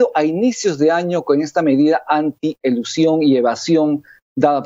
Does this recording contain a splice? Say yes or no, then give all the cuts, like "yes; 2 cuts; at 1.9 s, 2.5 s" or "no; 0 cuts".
no; 0 cuts